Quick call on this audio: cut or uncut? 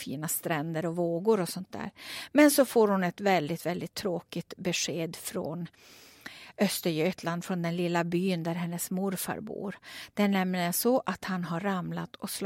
uncut